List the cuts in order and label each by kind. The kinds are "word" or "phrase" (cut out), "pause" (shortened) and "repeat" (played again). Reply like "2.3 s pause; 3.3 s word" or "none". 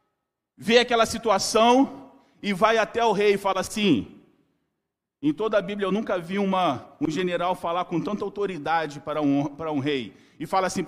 none